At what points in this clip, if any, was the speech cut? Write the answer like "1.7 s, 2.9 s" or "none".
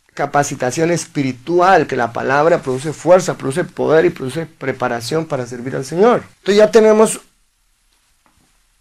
1.9 s, 6.3 s